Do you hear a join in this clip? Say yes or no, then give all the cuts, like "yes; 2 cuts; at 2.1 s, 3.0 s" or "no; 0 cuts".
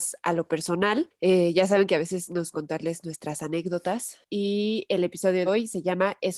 yes; 2 cuts; at 2.5 s, 5.5 s